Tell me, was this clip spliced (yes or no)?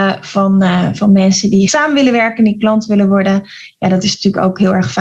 yes